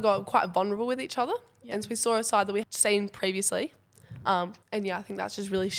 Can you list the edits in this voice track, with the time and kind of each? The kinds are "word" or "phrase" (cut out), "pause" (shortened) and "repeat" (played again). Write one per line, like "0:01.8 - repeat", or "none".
0:02.6 - word
0:04.6 - pause